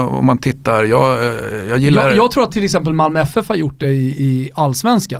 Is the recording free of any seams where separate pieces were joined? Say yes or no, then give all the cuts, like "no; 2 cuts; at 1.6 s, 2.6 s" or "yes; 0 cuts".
yes; 0 cuts